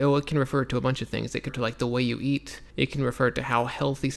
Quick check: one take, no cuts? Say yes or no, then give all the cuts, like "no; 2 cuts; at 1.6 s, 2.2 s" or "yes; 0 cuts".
no; 2 cuts; at 1.5 s, 2.7 s